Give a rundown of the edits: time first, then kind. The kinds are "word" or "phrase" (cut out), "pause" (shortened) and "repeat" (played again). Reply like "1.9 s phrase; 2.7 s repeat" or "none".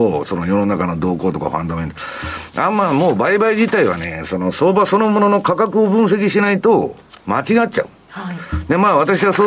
7.2 s pause